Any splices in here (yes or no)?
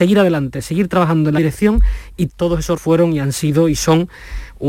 yes